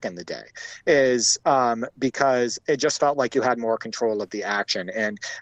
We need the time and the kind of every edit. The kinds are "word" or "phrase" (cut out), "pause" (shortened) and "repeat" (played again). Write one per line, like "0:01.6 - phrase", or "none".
none